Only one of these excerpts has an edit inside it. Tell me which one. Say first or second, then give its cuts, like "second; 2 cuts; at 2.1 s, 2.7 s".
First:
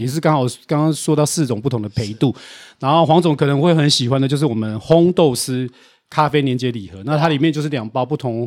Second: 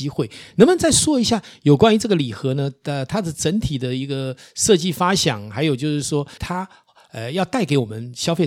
second; 1 cut; at 6.4 s